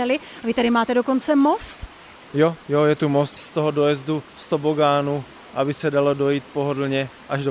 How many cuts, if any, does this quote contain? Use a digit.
1